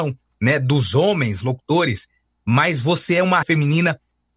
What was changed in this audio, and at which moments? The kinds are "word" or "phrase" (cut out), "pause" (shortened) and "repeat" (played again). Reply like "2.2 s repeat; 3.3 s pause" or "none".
3.4 s word